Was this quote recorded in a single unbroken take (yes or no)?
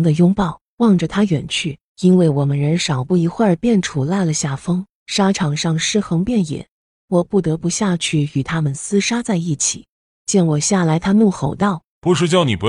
yes